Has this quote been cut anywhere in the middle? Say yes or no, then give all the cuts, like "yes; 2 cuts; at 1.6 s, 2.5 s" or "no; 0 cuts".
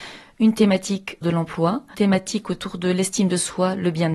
yes; 2 cuts; at 1.2 s, 1.9 s